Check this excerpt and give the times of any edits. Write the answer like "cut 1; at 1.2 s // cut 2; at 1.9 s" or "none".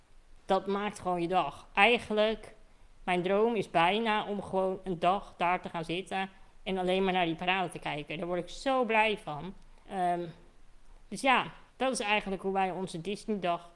cut 1; at 9.8 s // cut 2; at 11.7 s